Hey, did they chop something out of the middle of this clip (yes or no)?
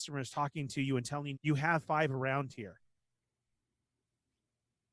yes